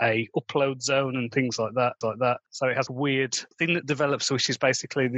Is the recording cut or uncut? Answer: cut